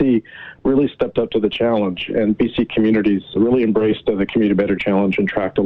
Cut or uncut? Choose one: cut